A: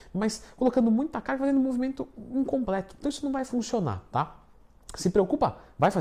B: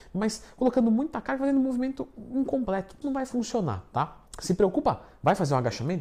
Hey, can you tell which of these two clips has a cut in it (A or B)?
B